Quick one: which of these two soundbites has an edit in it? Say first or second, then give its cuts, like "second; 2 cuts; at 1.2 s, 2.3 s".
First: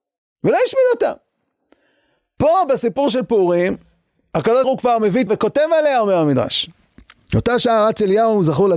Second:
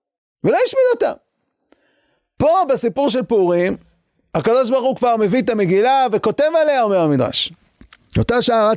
first; 2 cuts; at 4.6 s, 5.3 s